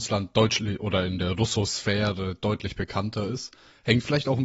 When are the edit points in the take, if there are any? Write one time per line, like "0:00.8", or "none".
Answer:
none